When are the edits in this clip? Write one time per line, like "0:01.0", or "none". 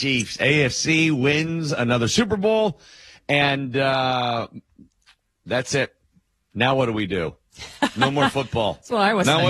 none